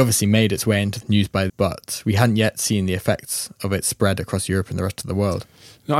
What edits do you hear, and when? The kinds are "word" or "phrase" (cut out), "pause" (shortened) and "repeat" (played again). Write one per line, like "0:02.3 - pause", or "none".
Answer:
0:01.0 - word
0:01.5 - word